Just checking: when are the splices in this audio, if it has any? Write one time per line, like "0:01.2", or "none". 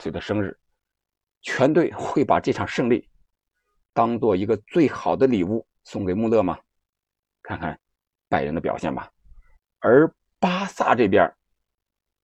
0:09.6